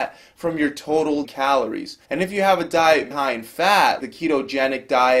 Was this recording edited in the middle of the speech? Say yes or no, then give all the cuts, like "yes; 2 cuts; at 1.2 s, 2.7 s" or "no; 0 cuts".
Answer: yes; 4 cuts; at 1.2 s, 2.0 s, 3.1 s, 4.0 s